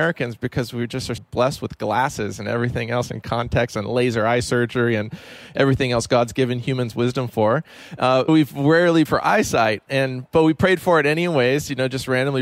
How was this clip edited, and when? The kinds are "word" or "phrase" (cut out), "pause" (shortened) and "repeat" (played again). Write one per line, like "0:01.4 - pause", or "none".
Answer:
0:01.2 - word
0:08.3 - word
0:09.1 - word